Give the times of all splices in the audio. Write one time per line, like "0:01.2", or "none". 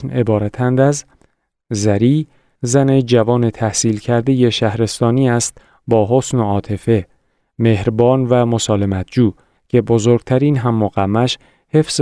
none